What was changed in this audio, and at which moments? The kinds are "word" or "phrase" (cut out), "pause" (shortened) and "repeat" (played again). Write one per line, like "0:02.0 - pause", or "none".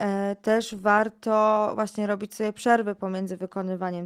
none